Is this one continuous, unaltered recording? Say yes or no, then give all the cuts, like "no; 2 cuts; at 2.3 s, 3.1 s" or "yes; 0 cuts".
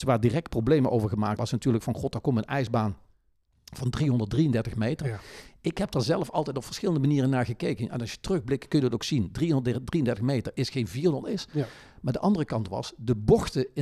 no; 2 cuts; at 1.4 s, 11.2 s